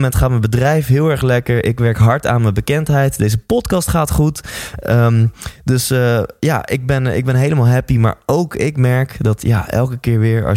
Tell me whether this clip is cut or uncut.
uncut